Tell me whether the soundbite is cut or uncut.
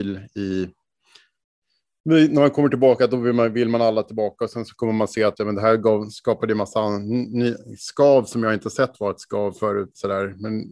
cut